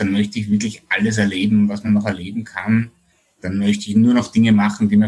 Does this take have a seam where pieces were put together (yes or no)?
no